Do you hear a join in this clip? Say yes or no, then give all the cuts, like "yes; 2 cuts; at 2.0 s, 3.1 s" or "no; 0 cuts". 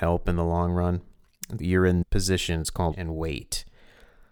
yes; 3 cuts; at 1.6 s, 2.0 s, 2.9 s